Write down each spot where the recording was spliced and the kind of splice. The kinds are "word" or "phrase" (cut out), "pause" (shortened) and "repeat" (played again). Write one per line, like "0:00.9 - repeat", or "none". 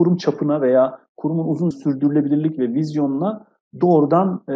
0:01.7 - word